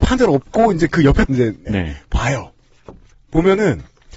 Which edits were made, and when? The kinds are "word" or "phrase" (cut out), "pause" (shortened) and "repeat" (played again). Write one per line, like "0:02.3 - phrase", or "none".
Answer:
0:01.3 - word
0:01.7 - phrase

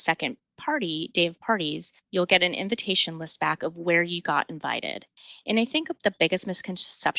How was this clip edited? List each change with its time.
0:02.0 - pause

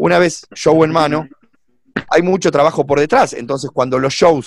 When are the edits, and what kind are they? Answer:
0:02.0 - word

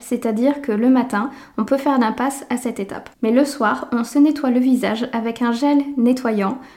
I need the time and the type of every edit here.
0:03.1 - pause

